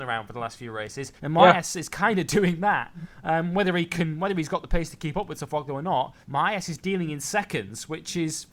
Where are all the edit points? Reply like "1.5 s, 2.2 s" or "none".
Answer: 1.2 s, 6.2 s